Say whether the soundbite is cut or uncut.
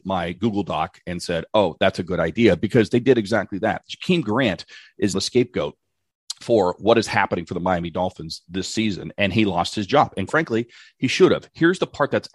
cut